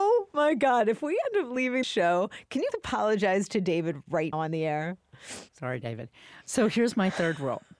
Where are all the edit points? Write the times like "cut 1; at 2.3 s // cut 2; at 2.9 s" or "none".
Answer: cut 1; at 1.8 s // cut 2; at 2.7 s // cut 3; at 4.3 s // cut 4; at 5.5 s